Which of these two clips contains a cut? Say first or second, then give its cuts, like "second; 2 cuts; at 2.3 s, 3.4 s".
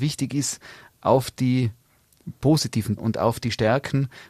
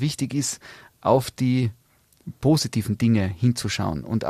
first; 1 cut; at 3.0 s